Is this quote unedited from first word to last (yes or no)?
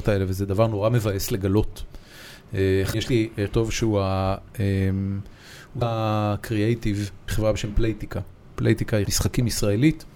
no